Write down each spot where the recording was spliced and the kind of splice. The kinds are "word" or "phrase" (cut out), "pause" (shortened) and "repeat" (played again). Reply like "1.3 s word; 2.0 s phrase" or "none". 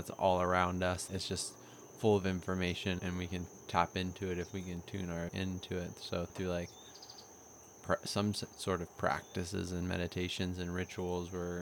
1.1 s word; 3.0 s word; 5.3 s word; 6.3 s word